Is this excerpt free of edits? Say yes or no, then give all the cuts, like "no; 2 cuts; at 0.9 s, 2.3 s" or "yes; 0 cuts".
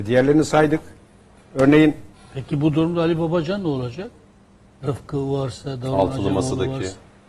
yes; 0 cuts